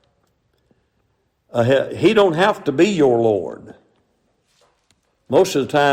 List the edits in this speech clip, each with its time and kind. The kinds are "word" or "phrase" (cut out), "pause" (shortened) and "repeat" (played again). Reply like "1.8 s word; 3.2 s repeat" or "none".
none